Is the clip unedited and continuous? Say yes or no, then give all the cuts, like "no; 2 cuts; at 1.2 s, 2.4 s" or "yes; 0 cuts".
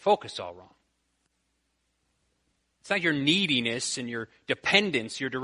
yes; 0 cuts